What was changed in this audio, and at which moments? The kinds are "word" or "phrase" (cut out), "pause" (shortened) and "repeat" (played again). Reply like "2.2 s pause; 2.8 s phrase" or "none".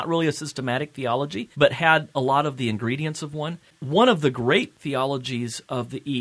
1.5 s pause; 4.8 s word